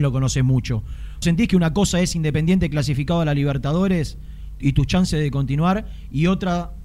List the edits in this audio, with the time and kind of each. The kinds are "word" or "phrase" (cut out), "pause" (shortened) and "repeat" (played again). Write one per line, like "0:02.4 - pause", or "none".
0:01.2 - word
0:04.6 - word

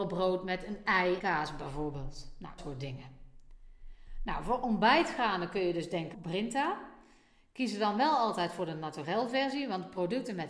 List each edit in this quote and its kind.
0:01.2 - word
0:02.6 - word
0:06.1 - phrase

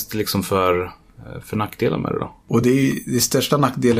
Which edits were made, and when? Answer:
none

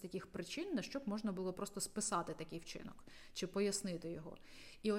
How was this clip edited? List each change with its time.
none

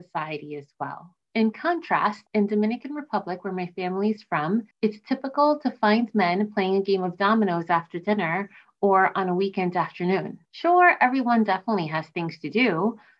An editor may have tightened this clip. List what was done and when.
0:01.2 - pause
0:02.3 - pause
0:04.7 - pause
0:10.5 - pause

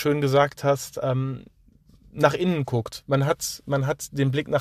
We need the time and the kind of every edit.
none

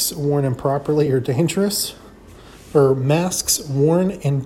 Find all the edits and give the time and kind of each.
none

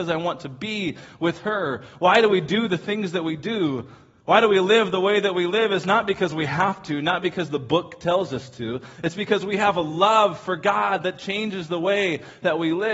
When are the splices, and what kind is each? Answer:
none

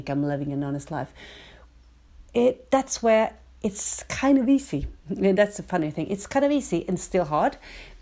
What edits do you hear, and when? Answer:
none

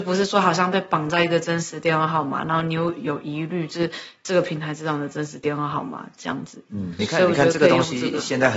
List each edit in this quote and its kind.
0:07.0 - word

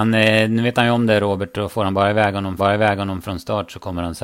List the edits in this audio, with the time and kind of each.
0:02.6 - repeat

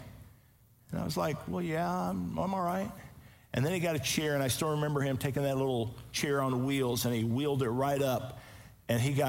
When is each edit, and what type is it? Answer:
none

